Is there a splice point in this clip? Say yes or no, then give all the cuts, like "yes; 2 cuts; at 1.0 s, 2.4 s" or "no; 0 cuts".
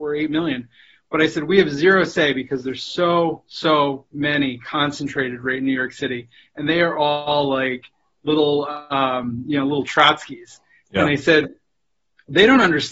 no; 0 cuts